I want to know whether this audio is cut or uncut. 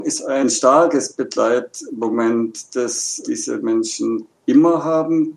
uncut